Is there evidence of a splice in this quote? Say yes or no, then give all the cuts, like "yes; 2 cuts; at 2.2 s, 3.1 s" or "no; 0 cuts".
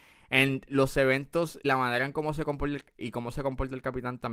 yes; 2 cuts; at 1.6 s, 3.0 s